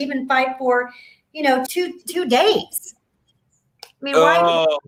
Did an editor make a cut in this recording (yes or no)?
yes